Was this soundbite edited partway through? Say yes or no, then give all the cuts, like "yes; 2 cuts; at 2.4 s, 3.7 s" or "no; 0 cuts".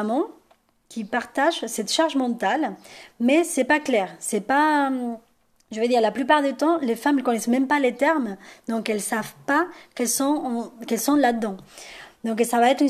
no; 0 cuts